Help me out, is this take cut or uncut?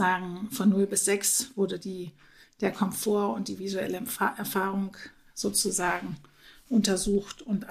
uncut